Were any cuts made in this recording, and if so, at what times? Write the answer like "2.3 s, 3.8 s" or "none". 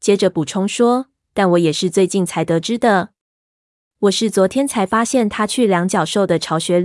none